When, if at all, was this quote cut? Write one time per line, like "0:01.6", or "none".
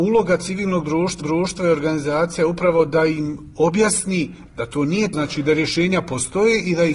0:01.2
0:05.1